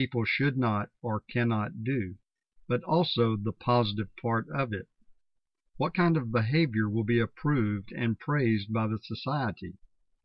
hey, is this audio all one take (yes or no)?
yes